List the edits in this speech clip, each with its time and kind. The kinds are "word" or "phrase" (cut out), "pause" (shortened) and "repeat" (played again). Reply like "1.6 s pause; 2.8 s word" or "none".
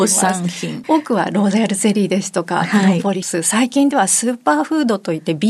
none